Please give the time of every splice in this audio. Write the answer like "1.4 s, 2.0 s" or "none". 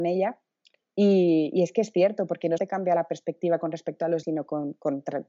2.6 s, 4.2 s